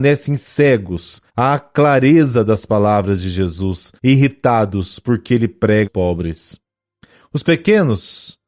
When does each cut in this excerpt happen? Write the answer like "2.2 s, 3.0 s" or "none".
1.3 s, 4.0 s, 5.9 s